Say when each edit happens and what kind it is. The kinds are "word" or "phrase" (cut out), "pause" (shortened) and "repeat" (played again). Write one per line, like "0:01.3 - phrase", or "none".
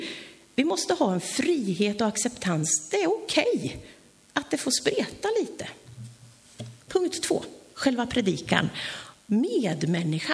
0:06.8 - pause

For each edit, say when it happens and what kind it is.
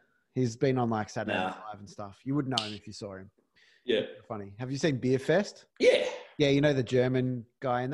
0:05.7 - pause

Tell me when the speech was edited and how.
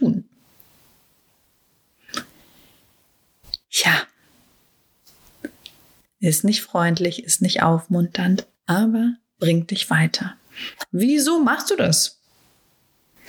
none

